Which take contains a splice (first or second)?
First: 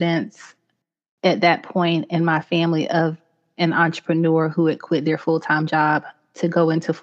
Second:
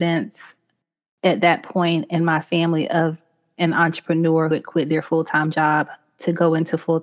second